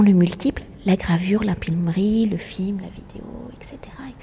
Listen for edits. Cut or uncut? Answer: uncut